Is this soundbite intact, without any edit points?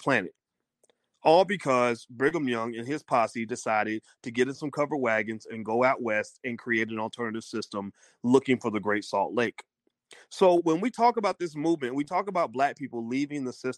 yes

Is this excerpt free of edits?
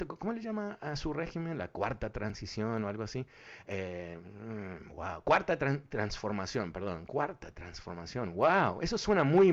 yes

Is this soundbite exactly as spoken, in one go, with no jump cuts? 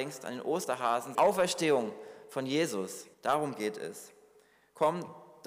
no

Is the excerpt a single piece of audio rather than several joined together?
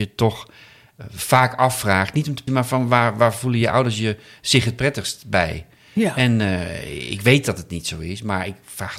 no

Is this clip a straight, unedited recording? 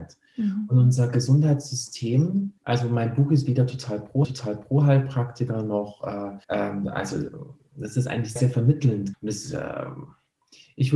no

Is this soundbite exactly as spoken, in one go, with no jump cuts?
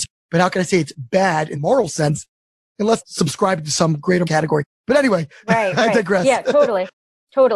no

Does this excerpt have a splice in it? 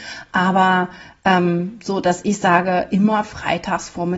no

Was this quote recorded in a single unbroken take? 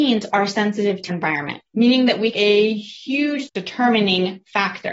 no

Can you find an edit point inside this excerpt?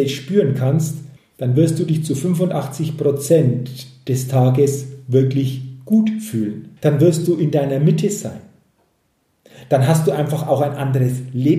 yes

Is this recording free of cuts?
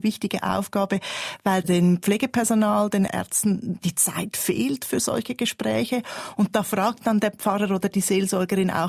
no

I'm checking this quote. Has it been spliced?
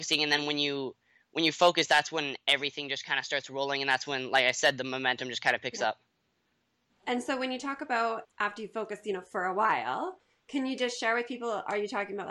yes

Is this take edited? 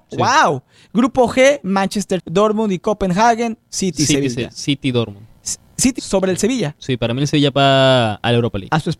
yes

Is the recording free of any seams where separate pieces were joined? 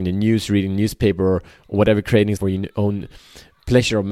no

